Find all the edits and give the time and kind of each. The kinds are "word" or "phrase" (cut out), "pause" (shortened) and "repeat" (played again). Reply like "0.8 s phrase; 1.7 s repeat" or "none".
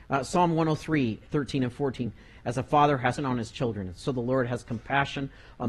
1.3 s pause; 3.2 s word

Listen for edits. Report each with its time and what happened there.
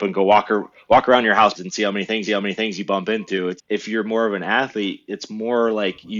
1.5 s word; 2.3 s repeat; 3.6 s word

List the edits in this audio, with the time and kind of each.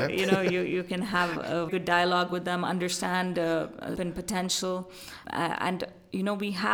1.7 s word; 4.0 s word; 5.2 s word

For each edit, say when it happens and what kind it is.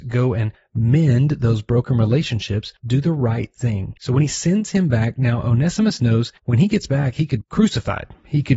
2.8 s pause; 4.0 s pause; 6.4 s pause; 7.4 s word

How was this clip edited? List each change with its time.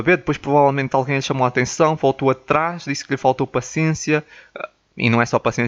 none

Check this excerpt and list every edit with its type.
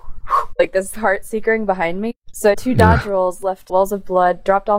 0.9 s word; 2.5 s phrase; 3.7 s word

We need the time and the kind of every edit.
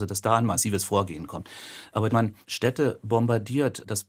2.1 s word; 2.4 s pause

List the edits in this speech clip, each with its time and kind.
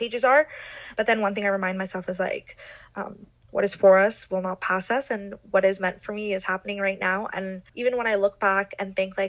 7.7 s pause

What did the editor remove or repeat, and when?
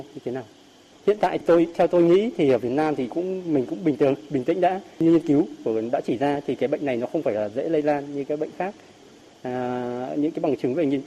1.4 s word

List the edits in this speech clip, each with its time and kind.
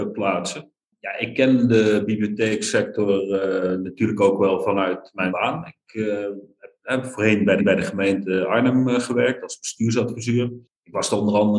5.3 s phrase; 7.6 s repeat

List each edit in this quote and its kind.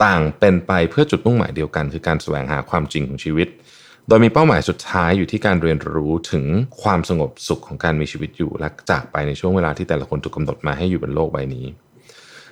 none

